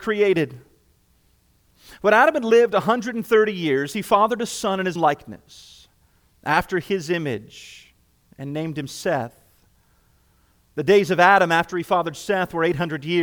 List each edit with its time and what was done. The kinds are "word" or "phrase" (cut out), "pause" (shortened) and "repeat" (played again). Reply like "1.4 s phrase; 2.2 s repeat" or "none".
5.0 s word